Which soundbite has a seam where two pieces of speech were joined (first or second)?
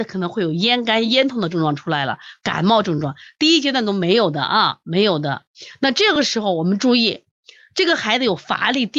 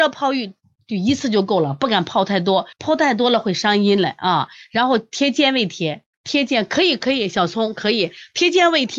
second